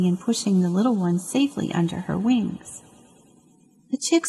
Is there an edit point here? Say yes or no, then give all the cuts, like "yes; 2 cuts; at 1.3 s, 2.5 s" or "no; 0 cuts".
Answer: no; 0 cuts